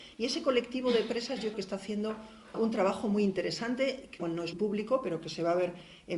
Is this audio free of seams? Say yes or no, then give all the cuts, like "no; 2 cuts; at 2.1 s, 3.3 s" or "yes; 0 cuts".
no; 4 cuts; at 1.5 s, 2.5 s, 4.2 s, 4.5 s